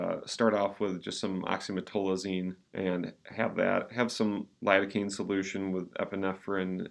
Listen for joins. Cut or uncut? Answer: cut